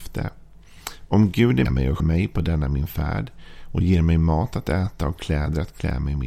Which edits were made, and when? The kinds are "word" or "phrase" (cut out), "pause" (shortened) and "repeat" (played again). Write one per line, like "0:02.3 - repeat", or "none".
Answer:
0:01.6 - word
0:02.0 - word